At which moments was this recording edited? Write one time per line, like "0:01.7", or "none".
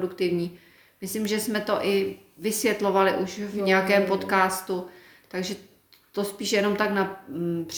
none